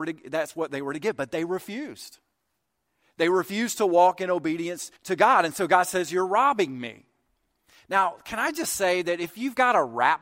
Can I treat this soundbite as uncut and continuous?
no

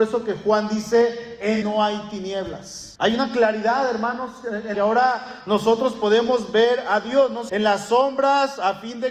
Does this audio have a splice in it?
yes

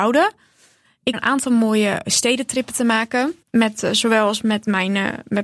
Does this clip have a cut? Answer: yes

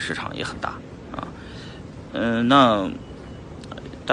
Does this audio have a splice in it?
no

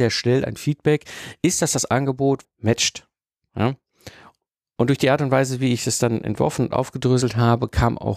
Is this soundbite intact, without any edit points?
no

